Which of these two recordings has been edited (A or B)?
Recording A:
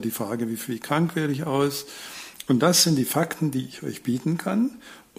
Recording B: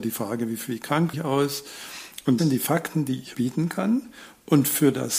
B